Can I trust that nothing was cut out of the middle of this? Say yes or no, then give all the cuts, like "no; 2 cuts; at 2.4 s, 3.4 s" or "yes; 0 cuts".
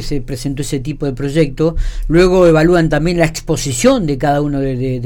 yes; 0 cuts